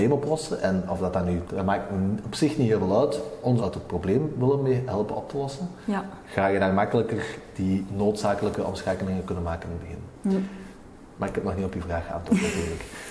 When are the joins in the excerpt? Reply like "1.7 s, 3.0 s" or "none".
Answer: 1.4 s, 3.6 s